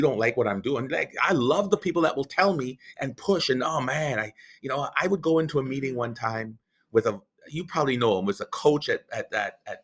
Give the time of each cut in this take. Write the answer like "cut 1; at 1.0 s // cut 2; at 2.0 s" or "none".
none